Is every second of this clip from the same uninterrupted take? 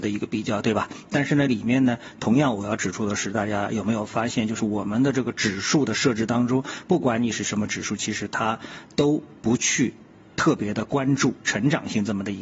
yes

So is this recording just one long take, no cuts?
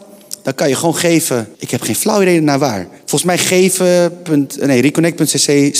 no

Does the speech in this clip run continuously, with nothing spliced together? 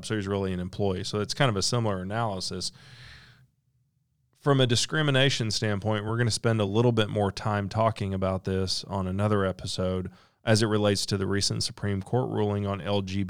yes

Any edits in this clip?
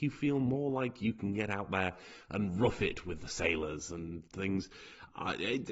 no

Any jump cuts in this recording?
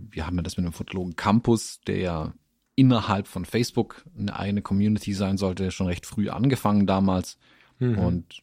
no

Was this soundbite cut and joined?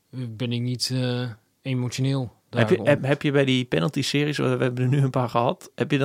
yes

